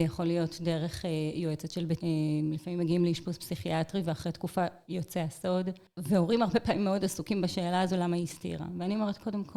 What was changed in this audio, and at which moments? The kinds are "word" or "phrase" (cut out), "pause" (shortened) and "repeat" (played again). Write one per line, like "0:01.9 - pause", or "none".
0:02.0 - word